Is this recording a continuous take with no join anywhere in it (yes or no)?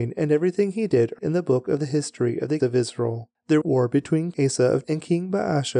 no